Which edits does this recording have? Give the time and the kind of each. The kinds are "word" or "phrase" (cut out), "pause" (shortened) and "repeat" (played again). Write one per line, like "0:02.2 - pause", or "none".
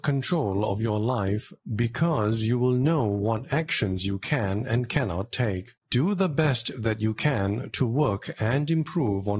0:05.8 - pause